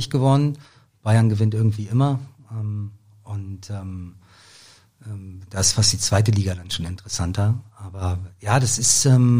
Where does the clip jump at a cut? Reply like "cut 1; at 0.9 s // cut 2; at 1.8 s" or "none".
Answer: none